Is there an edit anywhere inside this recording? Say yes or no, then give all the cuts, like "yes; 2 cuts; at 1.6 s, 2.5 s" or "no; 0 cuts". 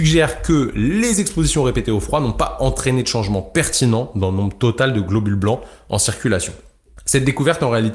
no; 0 cuts